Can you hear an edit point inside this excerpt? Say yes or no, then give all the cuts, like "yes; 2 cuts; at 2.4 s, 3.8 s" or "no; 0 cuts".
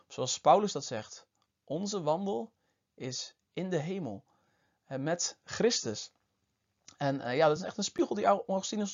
no; 0 cuts